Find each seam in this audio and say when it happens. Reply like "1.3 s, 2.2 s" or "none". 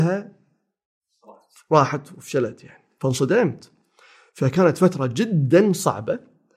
none

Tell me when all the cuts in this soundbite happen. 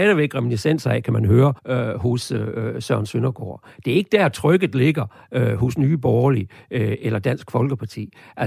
1.6 s

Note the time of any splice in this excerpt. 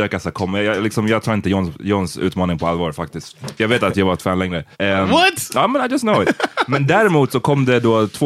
4.7 s

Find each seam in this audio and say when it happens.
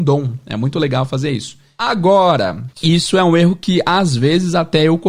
2.7 s

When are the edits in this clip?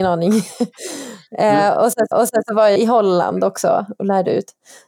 2.1 s, 2.8 s

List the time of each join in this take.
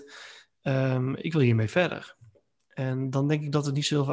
none

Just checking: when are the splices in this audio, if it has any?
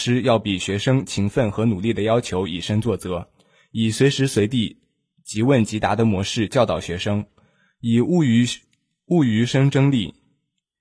none

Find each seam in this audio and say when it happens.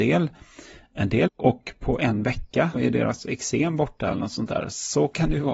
1.3 s, 2.7 s

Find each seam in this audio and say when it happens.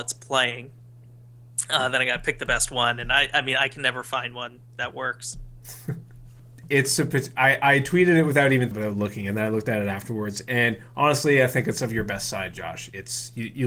8.7 s

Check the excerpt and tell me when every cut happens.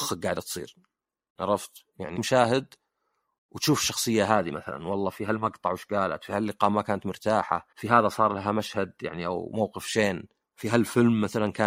2.2 s, 7.7 s, 10.4 s

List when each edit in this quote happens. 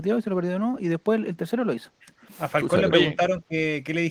none

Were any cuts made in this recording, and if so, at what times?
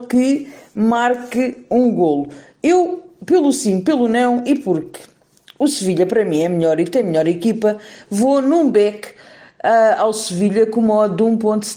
none

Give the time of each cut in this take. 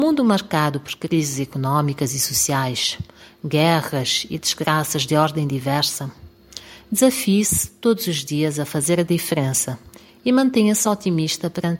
none

